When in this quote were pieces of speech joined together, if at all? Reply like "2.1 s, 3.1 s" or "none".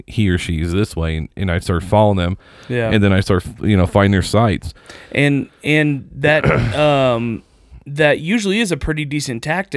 none